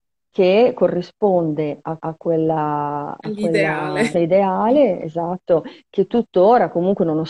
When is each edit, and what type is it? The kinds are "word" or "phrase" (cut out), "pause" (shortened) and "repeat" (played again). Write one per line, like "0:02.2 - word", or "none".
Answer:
0:02.0 - repeat
0:04.1 - word